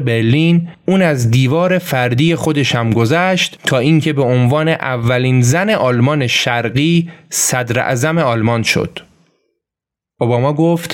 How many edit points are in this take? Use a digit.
0